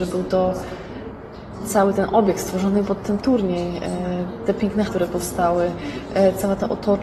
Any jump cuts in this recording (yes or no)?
yes